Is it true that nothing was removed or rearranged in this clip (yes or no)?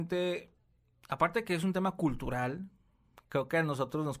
yes